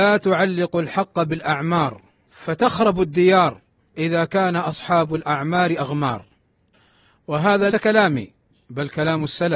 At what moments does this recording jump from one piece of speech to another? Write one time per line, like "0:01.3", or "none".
0:07.7